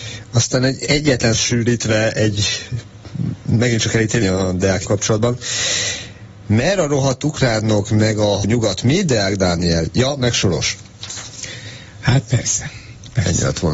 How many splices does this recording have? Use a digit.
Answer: 4